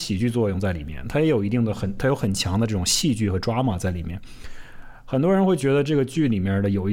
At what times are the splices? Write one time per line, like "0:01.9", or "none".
none